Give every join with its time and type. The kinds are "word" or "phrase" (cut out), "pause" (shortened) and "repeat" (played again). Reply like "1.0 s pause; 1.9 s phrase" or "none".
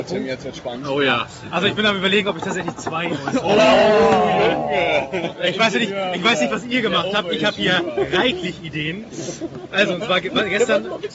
none